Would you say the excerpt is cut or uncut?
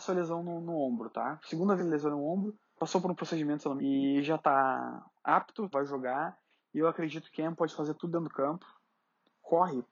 cut